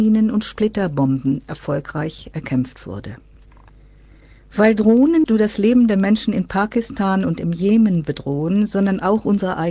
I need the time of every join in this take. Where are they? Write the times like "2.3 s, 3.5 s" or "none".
5.2 s